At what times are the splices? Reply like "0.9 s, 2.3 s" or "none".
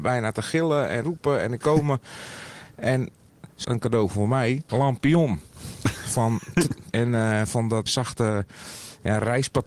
1.0 s, 1.6 s, 3.6 s, 4.7 s, 6.9 s, 7.9 s